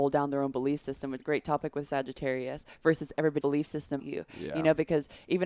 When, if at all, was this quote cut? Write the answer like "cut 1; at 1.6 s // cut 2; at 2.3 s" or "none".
cut 1; at 1.2 s // cut 2; at 3.4 s // cut 3; at 4.0 s